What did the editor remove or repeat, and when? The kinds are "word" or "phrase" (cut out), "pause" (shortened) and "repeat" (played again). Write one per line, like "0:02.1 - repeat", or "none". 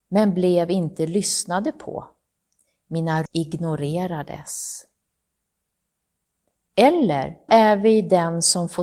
0:03.3 - word
0:07.5 - word